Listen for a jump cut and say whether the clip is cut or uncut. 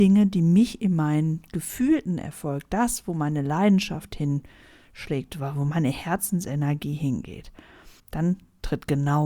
cut